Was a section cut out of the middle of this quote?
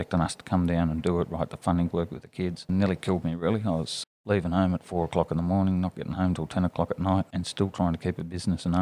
yes; 2 cuts; at 1.9 s, 4.0 s

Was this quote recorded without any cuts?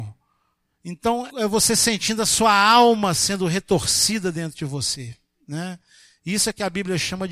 no; 1 cut; at 1.3 s

